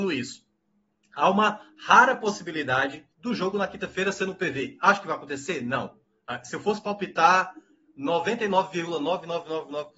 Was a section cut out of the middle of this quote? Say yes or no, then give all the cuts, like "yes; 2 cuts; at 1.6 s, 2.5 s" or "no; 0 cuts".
yes; 1 cut; at 3.1 s